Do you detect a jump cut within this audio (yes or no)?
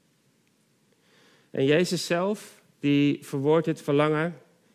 yes